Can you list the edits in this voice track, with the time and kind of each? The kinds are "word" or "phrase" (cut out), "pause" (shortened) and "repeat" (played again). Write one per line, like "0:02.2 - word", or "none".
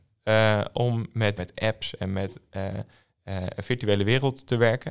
0:01.4 - word